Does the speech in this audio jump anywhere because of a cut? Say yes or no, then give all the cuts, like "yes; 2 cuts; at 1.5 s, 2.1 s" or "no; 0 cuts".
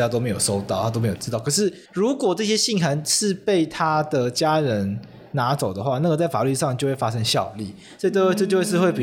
yes; 1 cut; at 1.9 s